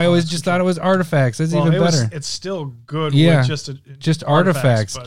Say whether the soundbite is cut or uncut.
uncut